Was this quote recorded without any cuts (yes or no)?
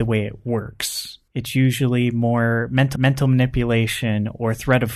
no